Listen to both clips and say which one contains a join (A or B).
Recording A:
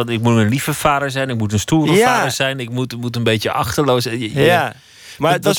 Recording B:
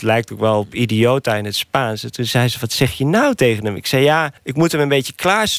B